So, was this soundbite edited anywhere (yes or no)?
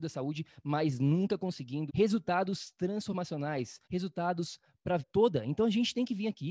yes